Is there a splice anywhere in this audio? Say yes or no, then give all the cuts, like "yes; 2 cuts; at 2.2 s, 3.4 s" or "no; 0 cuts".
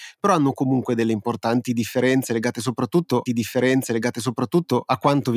yes; 1 cut; at 3.3 s